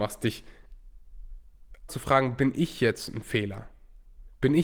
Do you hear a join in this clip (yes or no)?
yes